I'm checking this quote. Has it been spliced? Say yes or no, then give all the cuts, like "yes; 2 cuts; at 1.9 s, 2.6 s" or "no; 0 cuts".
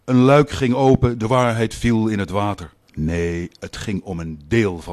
yes; 1 cut; at 2.8 s